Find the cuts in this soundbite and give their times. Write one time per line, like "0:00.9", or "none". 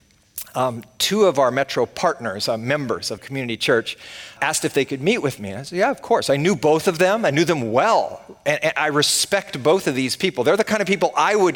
0:03.2
0:04.4